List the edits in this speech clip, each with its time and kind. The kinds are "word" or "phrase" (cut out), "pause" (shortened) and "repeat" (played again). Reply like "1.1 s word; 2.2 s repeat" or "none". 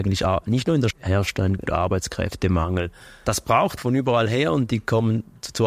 0.9 s word; 1.7 s phrase; 3.8 s word